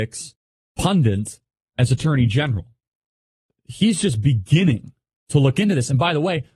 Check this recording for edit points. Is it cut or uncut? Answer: uncut